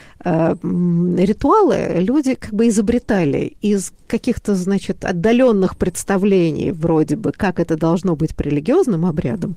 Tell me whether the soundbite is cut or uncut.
uncut